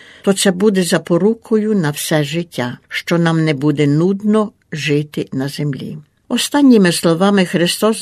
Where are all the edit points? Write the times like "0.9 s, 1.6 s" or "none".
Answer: 2.8 s